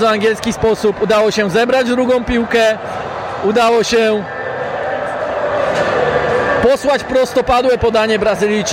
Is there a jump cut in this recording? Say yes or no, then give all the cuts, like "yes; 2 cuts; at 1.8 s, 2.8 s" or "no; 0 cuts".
no; 0 cuts